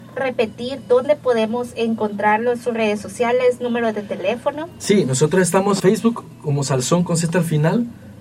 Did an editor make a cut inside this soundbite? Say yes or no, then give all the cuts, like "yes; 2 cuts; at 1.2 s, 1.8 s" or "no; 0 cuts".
yes; 1 cut; at 5.8 s